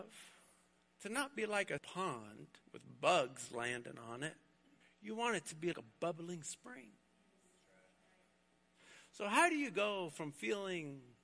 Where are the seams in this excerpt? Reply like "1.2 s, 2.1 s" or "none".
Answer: 1.8 s, 2.6 s, 4.8 s, 5.7 s